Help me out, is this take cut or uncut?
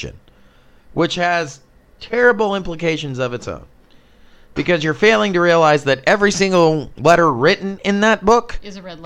uncut